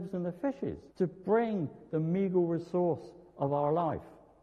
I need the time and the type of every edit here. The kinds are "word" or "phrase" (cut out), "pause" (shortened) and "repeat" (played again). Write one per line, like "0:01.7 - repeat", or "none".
0:00.9 - pause